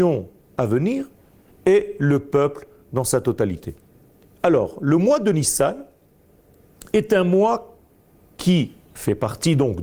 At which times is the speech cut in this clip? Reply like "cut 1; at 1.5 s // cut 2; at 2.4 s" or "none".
none

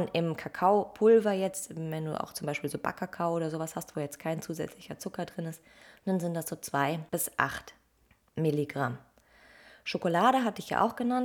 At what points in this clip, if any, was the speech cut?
cut 1; at 7.1 s // cut 2; at 8.1 s

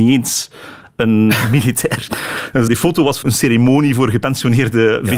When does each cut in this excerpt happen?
cut 1; at 2.7 s // cut 2; at 3.2 s

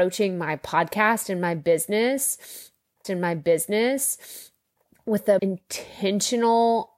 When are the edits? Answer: cut 1; at 3.0 s // cut 2; at 5.4 s

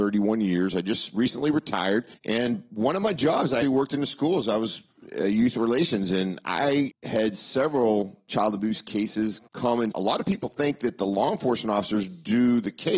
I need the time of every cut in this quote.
cut 1; at 2.2 s // cut 2; at 3.6 s // cut 3; at 6.9 s // cut 4; at 9.5 s // cut 5; at 9.9 s

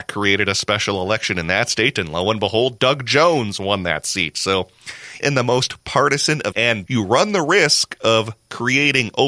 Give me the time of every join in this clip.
cut 1; at 2.8 s // cut 2; at 5.2 s // cut 3; at 6.5 s // cut 4; at 6.9 s

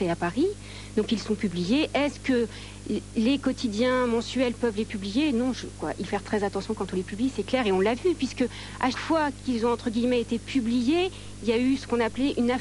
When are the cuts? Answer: cut 1; at 6.1 s // cut 2; at 8.9 s

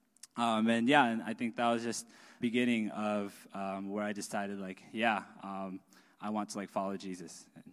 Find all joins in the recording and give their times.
cut 1; at 2.4 s

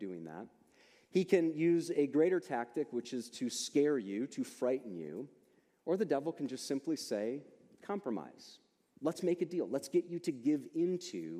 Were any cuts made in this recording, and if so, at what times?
none

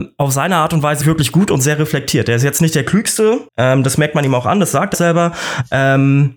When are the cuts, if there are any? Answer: cut 1; at 1.0 s // cut 2; at 3.5 s // cut 3; at 4.9 s

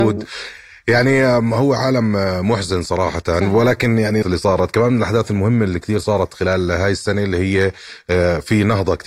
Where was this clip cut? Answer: cut 1; at 4.2 s

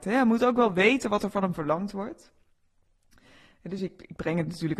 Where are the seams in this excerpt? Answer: none

